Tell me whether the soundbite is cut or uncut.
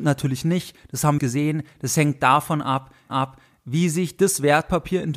cut